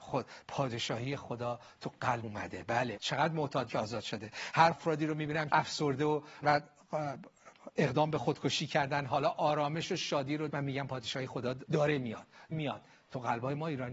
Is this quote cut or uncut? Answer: cut